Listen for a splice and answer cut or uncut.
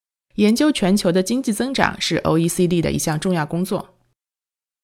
uncut